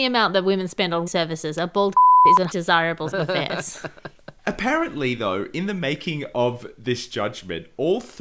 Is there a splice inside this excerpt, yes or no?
yes